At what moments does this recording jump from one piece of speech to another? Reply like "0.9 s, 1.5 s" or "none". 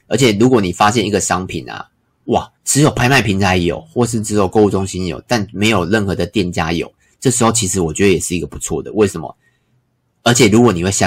2.6 s